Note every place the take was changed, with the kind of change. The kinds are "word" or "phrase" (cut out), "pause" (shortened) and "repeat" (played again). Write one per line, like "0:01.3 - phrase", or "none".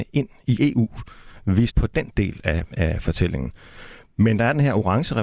0:01.7 - word